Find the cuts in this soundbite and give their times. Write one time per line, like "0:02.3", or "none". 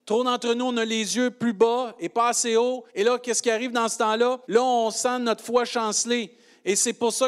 0:02.9
0:04.4